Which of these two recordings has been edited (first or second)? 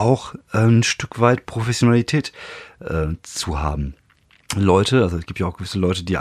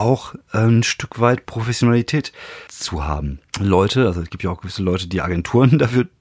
second